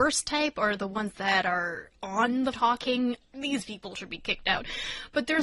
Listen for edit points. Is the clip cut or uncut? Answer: cut